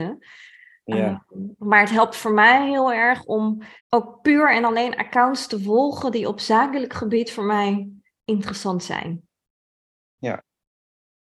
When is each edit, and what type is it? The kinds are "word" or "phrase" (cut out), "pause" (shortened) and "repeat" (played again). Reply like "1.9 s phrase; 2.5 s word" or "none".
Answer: 3.8 s pause